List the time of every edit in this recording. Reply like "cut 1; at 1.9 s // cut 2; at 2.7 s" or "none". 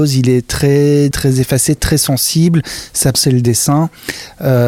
cut 1; at 1.1 s // cut 2; at 3.1 s

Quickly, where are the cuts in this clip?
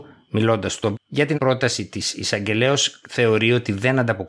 cut 1; at 0.9 s // cut 2; at 1.3 s // cut 3; at 3.0 s

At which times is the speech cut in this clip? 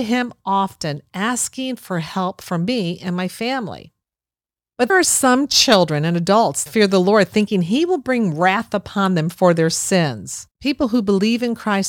cut 1; at 4.9 s // cut 2; at 6.7 s // cut 3; at 10.5 s

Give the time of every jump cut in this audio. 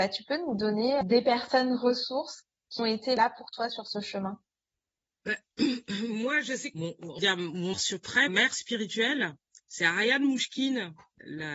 cut 1; at 2.8 s // cut 2; at 6.7 s // cut 3; at 7.2 s // cut 4; at 7.7 s // cut 5; at 8.3 s

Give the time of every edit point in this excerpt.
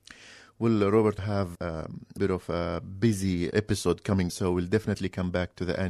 cut 1; at 1.2 s // cut 2; at 1.6 s // cut 3; at 2.2 s // cut 4; at 3.5 s // cut 5; at 4.3 s

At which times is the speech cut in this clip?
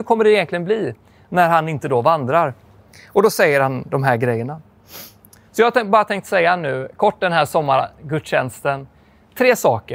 none

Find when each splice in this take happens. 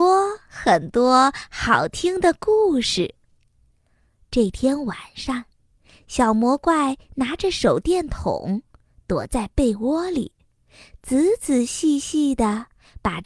none

